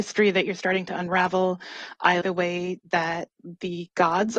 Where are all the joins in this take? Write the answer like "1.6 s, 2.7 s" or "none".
2.2 s